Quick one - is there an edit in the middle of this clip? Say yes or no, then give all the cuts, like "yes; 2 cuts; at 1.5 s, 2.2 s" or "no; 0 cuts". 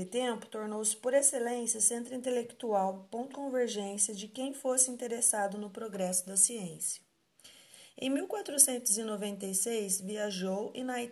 yes; 1 cut; at 3.3 s